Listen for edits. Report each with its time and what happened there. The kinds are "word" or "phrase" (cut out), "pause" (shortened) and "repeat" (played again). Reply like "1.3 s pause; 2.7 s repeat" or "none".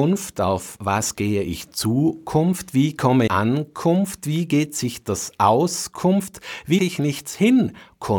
3.3 s word; 6.8 s word